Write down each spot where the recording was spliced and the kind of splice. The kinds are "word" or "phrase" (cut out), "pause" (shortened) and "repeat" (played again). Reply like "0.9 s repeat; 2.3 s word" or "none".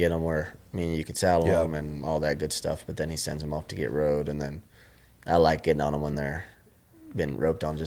none